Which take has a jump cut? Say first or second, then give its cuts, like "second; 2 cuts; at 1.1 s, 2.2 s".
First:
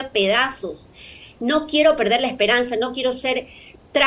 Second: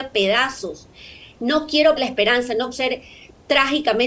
second; 2 cuts; at 2.0 s, 2.7 s